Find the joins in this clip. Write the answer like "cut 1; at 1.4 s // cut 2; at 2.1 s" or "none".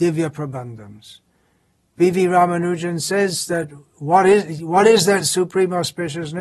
none

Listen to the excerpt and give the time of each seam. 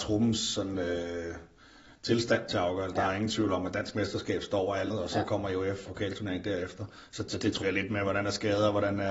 cut 1; at 2.5 s // cut 2; at 4.9 s // cut 3; at 5.9 s // cut 4; at 7.6 s

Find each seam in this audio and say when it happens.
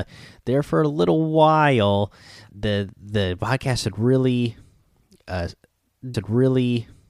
cut 1; at 2.5 s // cut 2; at 6.1 s

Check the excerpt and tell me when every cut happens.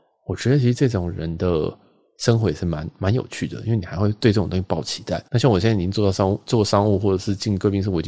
cut 1; at 5.3 s

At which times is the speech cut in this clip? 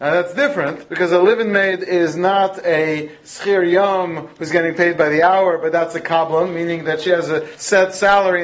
none

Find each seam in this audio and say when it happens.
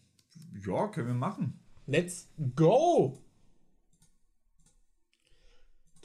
none

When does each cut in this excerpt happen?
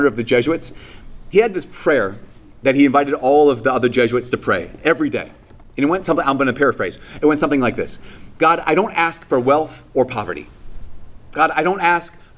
none

